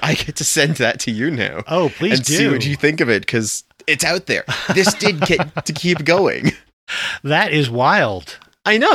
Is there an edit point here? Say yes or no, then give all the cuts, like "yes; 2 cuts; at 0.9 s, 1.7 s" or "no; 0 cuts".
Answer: no; 0 cuts